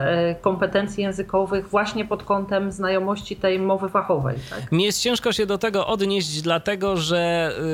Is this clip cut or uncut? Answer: uncut